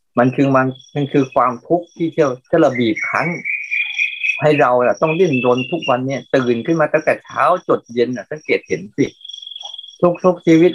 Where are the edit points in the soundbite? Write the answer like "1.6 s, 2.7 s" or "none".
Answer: 2.4 s